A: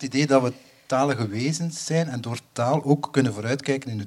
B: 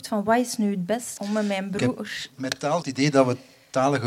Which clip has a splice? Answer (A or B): B